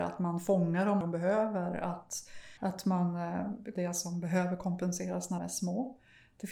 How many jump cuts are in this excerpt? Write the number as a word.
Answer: four